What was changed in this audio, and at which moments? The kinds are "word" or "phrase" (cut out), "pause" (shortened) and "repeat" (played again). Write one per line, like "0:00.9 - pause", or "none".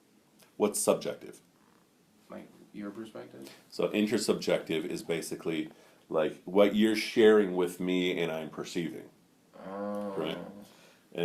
none